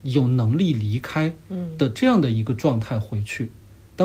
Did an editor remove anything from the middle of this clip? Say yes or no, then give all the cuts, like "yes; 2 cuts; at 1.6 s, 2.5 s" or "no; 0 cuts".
no; 0 cuts